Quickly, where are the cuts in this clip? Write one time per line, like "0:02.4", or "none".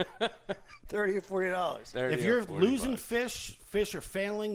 none